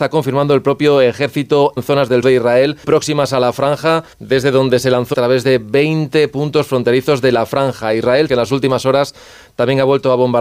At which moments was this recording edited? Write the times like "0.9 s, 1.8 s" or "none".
1.8 s, 2.2 s, 2.8 s, 4.1 s, 5.1 s, 8.3 s